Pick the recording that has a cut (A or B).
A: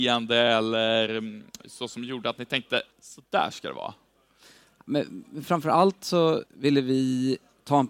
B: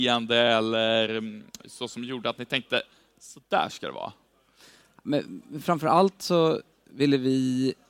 A